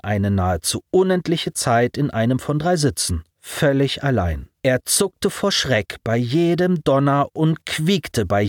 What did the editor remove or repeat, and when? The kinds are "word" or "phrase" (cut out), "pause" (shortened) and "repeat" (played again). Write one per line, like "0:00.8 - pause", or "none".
0:03.3 - pause
0:04.5 - pause